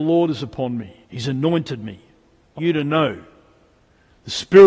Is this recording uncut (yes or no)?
no